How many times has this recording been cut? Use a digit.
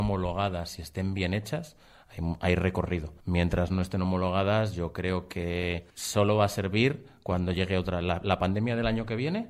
2